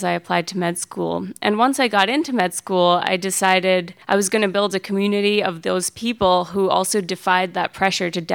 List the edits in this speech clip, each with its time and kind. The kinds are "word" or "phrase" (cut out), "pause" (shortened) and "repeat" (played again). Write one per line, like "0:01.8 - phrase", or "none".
0:04.0 - pause